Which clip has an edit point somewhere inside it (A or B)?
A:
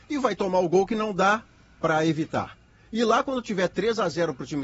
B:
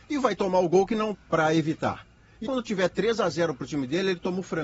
B